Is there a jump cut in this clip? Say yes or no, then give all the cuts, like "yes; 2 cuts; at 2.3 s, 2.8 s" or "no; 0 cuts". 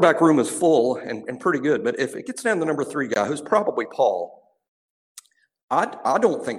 no; 0 cuts